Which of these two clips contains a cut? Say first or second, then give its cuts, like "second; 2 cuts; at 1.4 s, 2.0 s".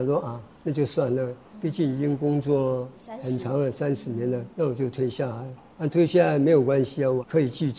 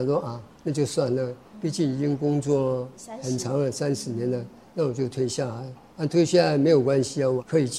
first; 1 cut; at 4.5 s